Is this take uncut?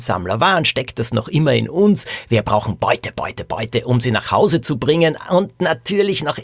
yes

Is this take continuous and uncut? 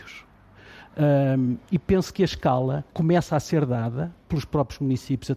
no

